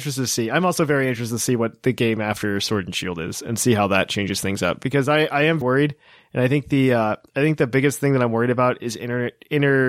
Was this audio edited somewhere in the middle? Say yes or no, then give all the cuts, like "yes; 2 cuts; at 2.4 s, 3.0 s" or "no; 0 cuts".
yes; 1 cut; at 5.6 s